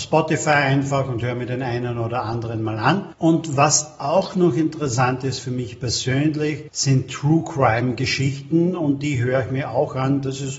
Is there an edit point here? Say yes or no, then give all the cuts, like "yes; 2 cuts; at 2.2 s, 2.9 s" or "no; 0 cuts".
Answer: no; 0 cuts